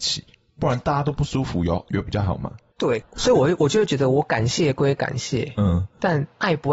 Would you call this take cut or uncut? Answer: cut